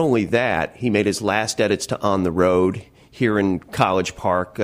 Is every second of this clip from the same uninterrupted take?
yes; 0 cuts

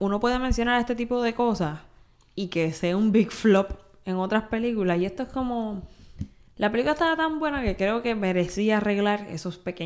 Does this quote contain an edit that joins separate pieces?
no; 0 cuts

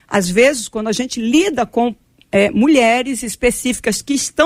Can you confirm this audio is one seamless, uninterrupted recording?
yes; 0 cuts

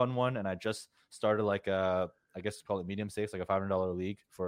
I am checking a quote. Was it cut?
no; 0 cuts

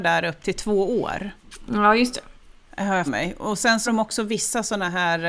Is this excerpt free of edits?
no; 2 cuts; at 3.1 s, 3.9 s

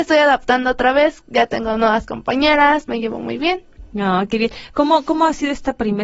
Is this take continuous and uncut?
yes; 0 cuts

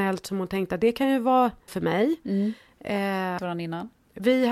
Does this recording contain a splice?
yes; 2 cuts; at 1.7 s, 3.4 s

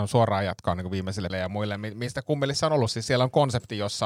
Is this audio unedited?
no; 1 cut; at 1.3 s

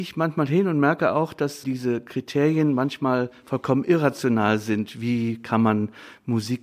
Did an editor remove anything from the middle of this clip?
yes; 1 cut; at 1.6 s

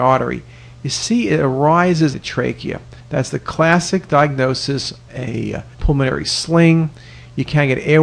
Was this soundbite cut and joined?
yes; 4 cuts; at 2.1 s, 3.0 s, 5.1 s, 5.7 s

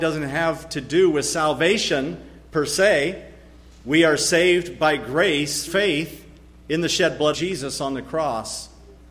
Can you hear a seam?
yes; 2 cuts; at 5.7 s, 7.3 s

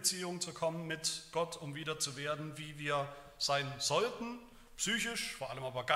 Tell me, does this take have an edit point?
no; 0 cuts

